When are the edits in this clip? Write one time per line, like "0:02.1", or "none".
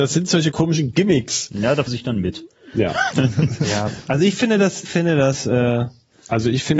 0:01.9
0:04.8